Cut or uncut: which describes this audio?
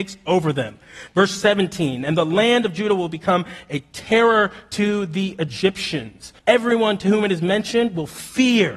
cut